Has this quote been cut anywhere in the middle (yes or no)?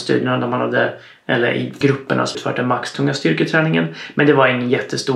yes